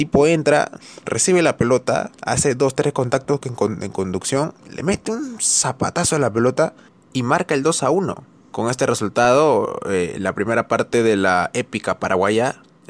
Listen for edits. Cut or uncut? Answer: cut